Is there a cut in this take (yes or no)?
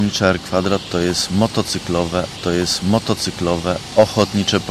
yes